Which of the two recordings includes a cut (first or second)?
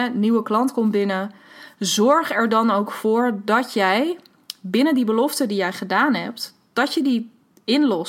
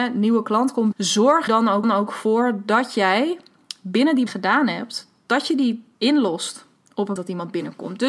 second